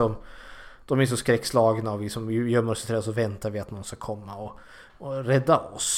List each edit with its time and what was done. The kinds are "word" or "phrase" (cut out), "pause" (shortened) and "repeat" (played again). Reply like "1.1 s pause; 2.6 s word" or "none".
none